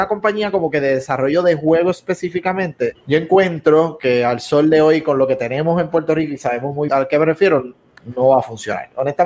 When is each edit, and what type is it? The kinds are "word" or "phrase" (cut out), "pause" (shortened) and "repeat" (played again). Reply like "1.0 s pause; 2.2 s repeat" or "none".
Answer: 2.9 s word; 6.9 s word